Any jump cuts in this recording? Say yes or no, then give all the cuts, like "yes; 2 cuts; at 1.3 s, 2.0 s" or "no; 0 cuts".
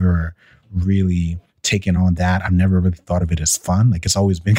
no; 0 cuts